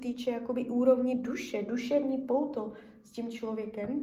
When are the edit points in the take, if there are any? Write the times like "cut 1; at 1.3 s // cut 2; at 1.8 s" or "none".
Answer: none